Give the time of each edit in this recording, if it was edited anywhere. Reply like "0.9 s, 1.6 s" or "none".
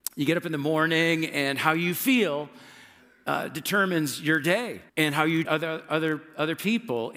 4.9 s, 5.4 s